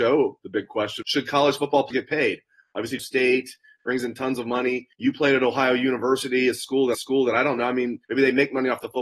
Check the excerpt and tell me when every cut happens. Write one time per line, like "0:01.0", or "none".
0:01.0
0:01.9
0:03.0
0:04.9
0:06.9
0:08.0